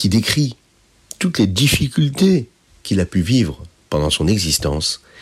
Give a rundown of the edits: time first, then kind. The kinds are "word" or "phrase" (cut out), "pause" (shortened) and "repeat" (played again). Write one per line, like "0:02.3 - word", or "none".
none